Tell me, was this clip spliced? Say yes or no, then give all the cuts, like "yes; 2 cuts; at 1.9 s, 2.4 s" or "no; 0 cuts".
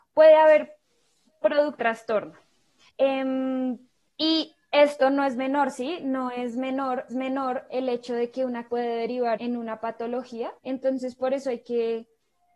yes; 6 cuts; at 1.8 s, 4.1 s, 7.1 s, 8.7 s, 9.4 s, 10.6 s